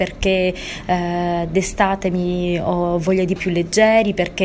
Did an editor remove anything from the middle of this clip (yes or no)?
yes